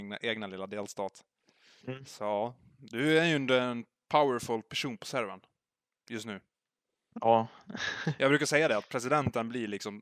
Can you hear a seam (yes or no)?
no